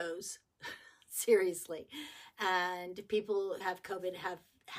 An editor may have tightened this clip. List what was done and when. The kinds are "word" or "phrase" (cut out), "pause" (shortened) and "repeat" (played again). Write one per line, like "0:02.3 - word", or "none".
0:03.6 - word